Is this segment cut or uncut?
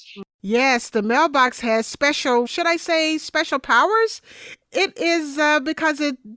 cut